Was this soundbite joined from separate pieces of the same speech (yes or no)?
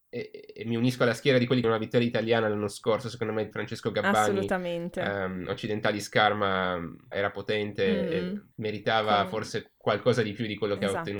yes